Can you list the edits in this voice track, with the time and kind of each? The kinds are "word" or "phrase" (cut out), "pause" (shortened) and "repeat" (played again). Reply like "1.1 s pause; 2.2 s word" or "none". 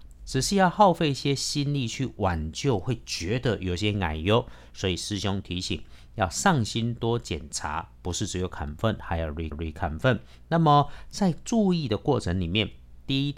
9.5 s repeat